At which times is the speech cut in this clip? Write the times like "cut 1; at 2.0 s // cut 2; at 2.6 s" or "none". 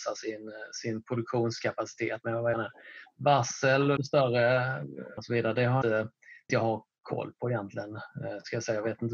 cut 1; at 2.2 s // cut 2; at 2.5 s // cut 3; at 4.0 s // cut 4; at 5.2 s // cut 5; at 5.8 s // cut 6; at 6.5 s